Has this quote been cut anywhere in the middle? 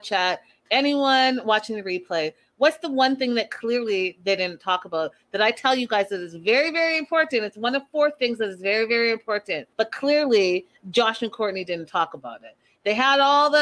yes; 1 cut; at 9.7 s

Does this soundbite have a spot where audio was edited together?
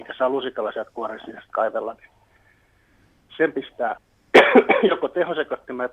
no; 0 cuts

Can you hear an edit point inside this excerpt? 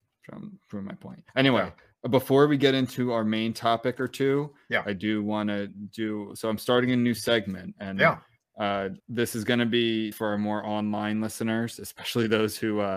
yes; 3 cuts; at 1.3 s, 9.0 s, 10.1 s

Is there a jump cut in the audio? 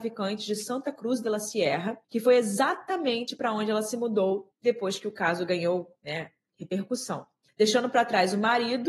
yes; 3 cuts; at 2.0 s, 4.5 s, 7.5 s

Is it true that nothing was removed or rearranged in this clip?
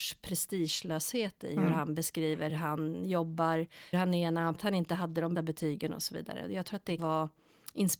no; 5 cuts; at 2.5 s, 3.9 s, 4.6 s, 5.4 s, 7.0 s

